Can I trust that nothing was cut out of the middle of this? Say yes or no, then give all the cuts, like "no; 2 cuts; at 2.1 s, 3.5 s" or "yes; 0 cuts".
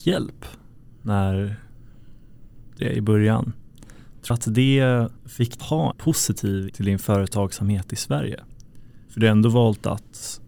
no; 6 cuts; at 2.8 s, 4.3 s, 5.2 s, 5.6 s, 5.9 s, 6.7 s